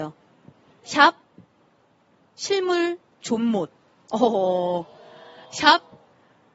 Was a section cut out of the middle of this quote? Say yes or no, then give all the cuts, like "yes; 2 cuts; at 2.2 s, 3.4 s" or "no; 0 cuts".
no; 0 cuts